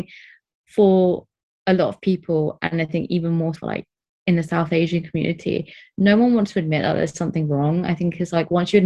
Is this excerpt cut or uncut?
cut